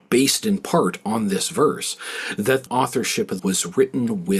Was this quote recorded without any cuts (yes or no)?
no